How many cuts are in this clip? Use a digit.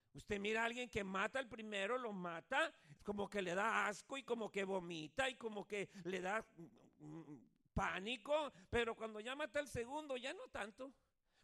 1